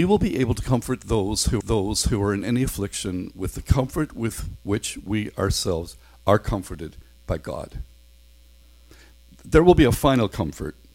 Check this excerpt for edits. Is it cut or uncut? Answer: cut